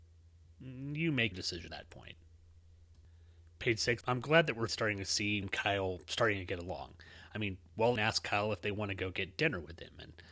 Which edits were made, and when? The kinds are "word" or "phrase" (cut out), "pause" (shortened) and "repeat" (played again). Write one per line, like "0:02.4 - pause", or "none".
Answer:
0:01.3 - word
0:01.7 - word
0:04.0 - word
0:04.7 - word
0:05.4 - word
0:08.0 - word